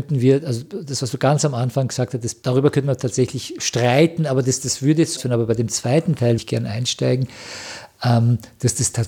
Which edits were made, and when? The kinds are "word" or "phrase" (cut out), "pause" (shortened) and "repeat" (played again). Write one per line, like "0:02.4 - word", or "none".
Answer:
0:05.2 - word
0:06.4 - word